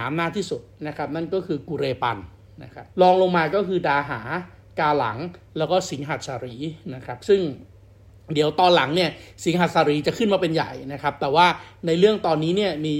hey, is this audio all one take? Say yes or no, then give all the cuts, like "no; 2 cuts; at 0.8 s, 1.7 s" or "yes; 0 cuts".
no; 1 cut; at 2.9 s